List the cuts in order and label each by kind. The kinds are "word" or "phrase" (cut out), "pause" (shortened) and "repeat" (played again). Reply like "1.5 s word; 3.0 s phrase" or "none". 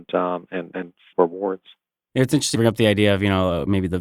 1.1 s word; 2.5 s word